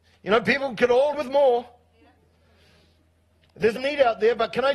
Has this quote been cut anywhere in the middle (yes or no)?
yes